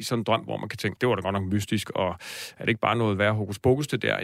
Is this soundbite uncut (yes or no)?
no